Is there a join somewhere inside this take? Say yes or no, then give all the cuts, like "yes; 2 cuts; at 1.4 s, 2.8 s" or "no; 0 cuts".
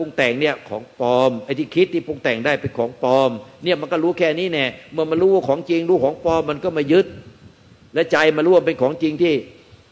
no; 0 cuts